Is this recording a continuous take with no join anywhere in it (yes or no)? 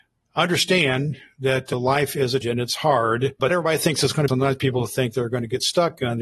no